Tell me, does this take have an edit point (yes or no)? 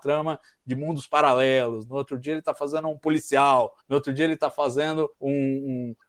yes